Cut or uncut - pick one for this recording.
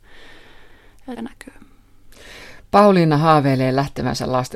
cut